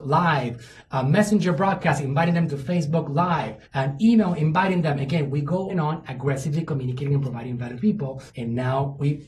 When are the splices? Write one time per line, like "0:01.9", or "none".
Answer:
0:03.7
0:05.7
0:07.8
0:08.3